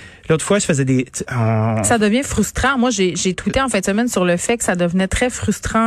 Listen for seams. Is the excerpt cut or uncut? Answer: uncut